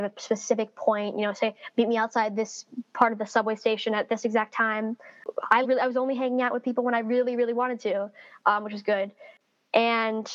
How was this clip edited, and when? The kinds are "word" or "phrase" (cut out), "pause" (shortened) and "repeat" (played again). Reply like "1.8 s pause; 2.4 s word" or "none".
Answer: 5.6 s word